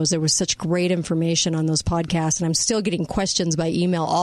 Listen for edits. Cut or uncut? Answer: uncut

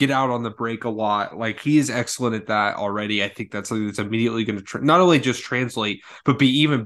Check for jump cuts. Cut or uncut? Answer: uncut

